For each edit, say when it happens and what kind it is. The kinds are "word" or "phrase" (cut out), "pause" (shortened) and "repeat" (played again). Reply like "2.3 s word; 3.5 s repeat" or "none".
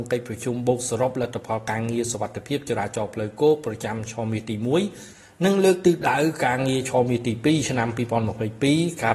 none